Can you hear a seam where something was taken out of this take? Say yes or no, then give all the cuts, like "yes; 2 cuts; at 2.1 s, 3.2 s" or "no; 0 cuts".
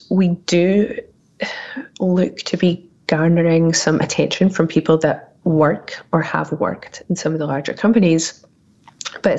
no; 0 cuts